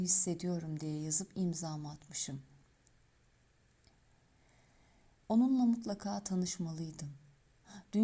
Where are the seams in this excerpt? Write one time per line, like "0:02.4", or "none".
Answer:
none